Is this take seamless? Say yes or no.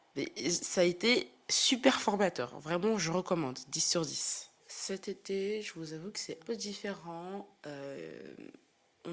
no